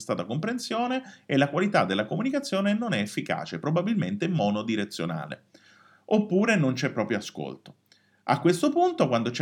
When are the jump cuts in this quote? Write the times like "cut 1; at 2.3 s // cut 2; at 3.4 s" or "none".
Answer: none